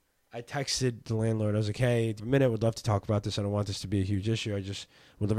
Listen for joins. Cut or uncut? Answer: cut